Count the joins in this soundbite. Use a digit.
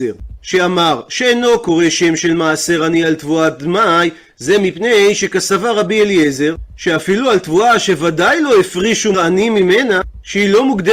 1